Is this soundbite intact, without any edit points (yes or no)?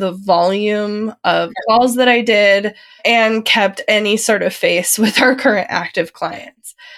yes